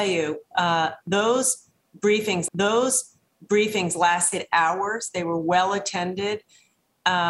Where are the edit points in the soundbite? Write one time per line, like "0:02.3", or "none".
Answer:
0:02.5